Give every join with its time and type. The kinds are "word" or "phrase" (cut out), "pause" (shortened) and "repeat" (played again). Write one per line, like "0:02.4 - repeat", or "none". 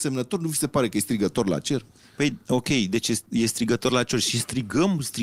none